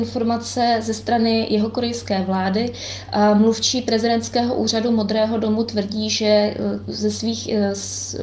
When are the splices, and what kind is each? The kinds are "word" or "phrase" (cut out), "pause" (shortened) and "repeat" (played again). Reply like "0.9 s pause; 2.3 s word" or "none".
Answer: none